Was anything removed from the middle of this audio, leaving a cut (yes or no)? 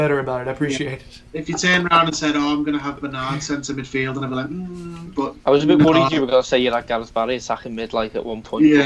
no